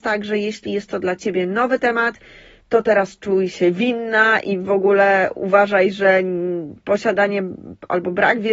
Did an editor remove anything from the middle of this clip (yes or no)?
no